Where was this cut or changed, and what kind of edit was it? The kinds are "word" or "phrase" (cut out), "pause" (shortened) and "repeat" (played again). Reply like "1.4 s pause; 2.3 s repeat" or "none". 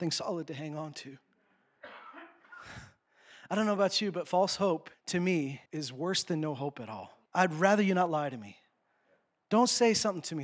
4.9 s pause; 5.7 s pause; 7.3 s pause